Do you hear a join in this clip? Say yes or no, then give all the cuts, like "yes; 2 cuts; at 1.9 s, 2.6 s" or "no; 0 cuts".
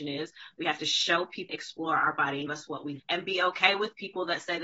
yes; 3 cuts; at 1.5 s, 2.5 s, 3.0 s